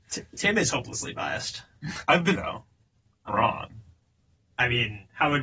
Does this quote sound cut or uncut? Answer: cut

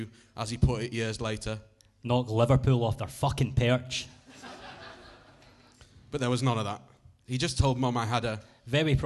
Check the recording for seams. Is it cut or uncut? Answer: uncut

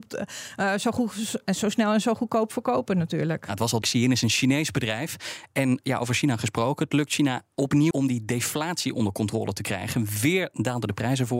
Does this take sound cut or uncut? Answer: cut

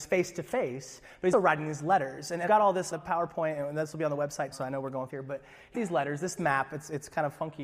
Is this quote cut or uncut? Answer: cut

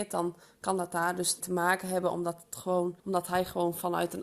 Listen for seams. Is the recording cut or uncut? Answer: cut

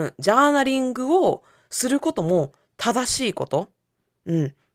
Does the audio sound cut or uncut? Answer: uncut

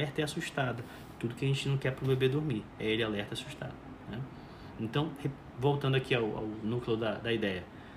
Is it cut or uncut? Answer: uncut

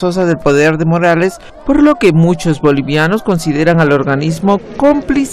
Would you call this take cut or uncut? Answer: uncut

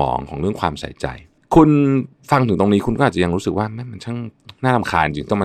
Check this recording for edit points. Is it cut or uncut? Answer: cut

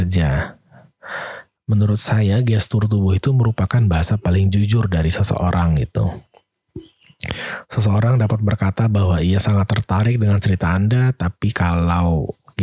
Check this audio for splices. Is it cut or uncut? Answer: uncut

